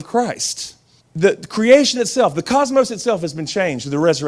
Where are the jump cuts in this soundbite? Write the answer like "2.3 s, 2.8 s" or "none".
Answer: 1.0 s